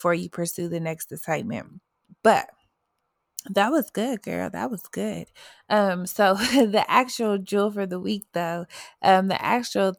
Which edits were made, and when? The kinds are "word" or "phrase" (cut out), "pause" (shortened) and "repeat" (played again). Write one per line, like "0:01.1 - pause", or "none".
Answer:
none